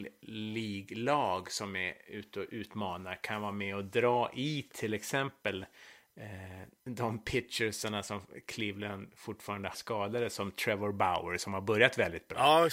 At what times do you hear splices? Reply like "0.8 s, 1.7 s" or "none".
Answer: 9.7 s